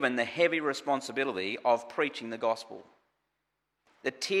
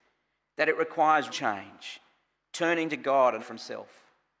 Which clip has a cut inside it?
second; 2 cuts; at 1.3 s, 3.4 s

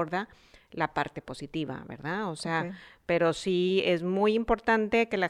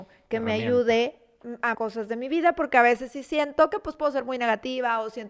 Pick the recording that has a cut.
second; 1 cut; at 1.7 s

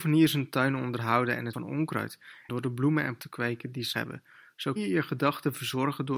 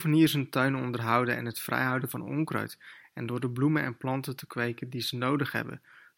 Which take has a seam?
first; 5 cuts; at 1.5 s, 2.5 s, 3.2 s, 3.9 s, 4.8 s

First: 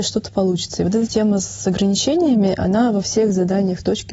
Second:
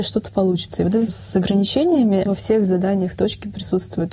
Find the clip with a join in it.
second; 2 cuts; at 1.1 s, 2.3 s

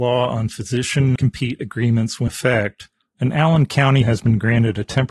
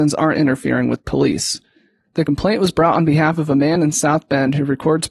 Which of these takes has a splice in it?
first; 3 cuts; at 1.2 s, 2.3 s, 4.0 s

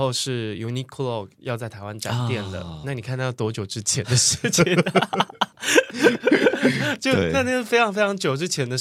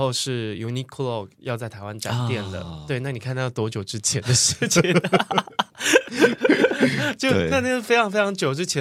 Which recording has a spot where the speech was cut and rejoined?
first; 1 cut; at 2.8 s

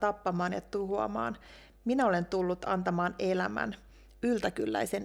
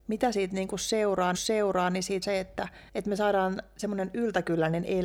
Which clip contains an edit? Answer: second; 3 cuts; at 1.3 s, 2.2 s, 2.9 s

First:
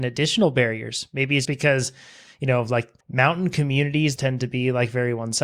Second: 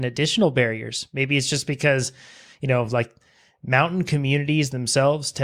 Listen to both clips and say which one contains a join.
first; 3 cuts; at 1.4 s, 3.0 s, 4.2 s

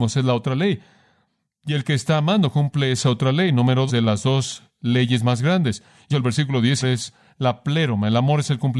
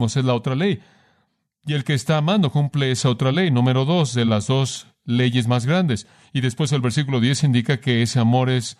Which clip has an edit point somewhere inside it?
first; 3 cuts; at 3.9 s, 6.1 s, 6.8 s

